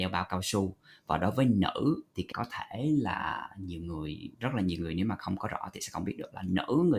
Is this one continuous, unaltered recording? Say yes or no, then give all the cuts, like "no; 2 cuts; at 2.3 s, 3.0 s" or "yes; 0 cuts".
no; 2 cuts; at 2.3 s, 4.3 s